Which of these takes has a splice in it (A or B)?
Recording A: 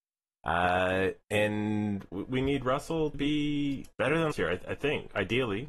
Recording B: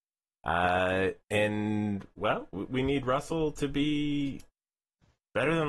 A